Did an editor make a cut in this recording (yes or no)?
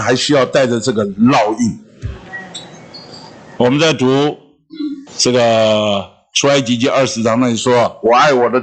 yes